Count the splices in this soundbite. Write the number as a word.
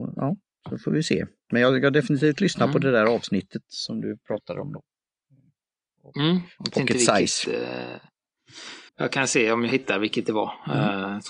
one